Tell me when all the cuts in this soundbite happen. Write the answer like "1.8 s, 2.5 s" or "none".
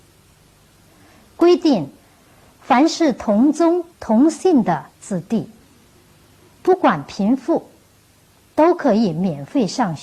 3.9 s, 4.9 s